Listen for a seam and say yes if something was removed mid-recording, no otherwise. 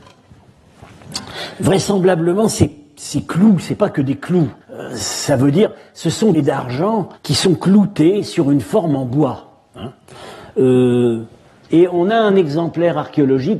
yes